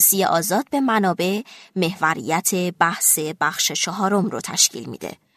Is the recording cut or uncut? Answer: uncut